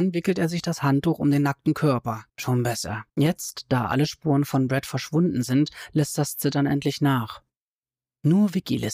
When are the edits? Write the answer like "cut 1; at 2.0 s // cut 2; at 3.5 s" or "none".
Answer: cut 1; at 2.3 s // cut 2; at 3.1 s